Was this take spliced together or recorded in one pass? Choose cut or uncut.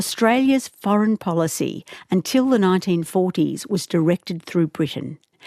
uncut